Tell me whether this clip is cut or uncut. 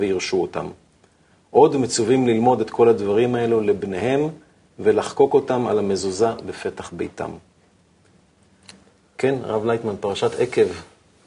uncut